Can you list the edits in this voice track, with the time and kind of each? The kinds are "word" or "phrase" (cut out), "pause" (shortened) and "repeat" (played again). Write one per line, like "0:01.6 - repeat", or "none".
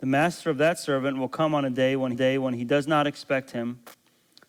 0:02.1 - repeat